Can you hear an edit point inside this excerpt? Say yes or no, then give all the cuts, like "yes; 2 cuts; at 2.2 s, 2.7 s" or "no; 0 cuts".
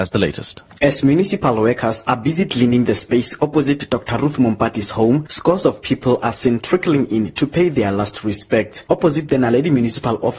no; 0 cuts